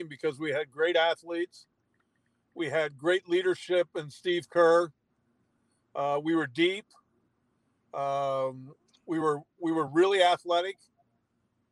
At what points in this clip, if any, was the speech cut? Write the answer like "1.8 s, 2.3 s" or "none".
none